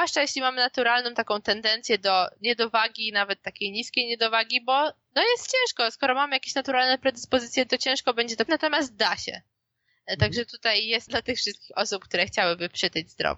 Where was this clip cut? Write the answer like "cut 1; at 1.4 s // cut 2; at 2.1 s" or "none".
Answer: cut 1; at 7.7 s // cut 2; at 8.5 s // cut 3; at 11.1 s